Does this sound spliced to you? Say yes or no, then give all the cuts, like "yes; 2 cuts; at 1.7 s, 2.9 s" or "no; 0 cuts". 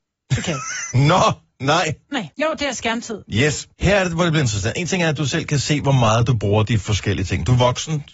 yes; 2 cuts; at 2.3 s, 3.7 s